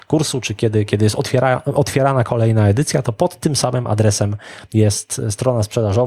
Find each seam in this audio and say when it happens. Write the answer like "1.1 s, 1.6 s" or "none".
none

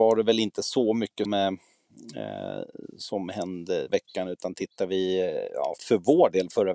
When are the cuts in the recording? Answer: 1.2 s, 3.9 s, 5.8 s

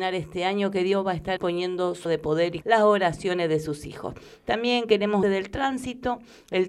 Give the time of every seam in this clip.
1.4 s, 2.1 s, 2.6 s, 5.2 s

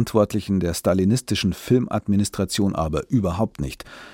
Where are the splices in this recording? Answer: none

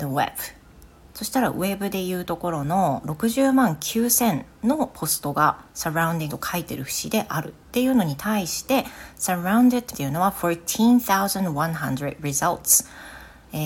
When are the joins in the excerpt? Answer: 1.1 s, 6.3 s, 7.6 s, 9.9 s

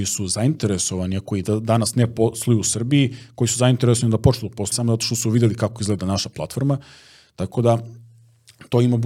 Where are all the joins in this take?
4.7 s

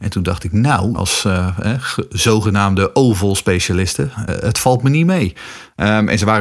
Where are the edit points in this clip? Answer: 0.9 s, 4.3 s

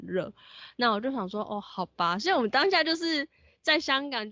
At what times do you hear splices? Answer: none

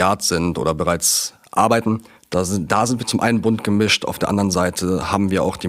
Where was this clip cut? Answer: 2.2 s

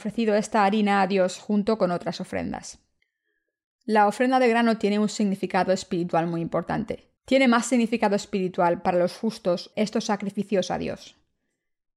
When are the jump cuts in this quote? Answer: 3.0 s, 7.2 s, 9.7 s

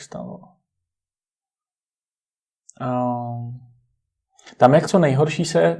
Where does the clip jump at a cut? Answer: 4.9 s

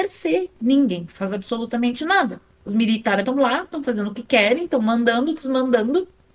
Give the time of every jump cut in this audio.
3.2 s

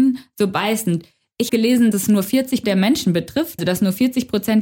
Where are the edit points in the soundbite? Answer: 1.5 s, 1.9 s, 2.6 s, 3.6 s

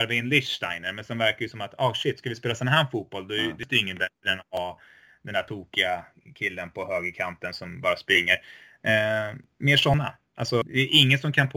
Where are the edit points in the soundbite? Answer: none

